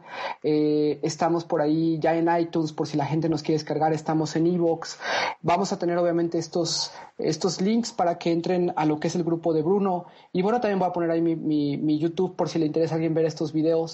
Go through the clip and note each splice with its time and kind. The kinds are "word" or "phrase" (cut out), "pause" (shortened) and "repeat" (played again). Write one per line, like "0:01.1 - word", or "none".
none